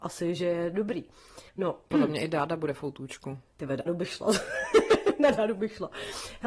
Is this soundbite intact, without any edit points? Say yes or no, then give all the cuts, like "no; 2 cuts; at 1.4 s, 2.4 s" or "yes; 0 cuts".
no; 2 cuts; at 1.5 s, 3.9 s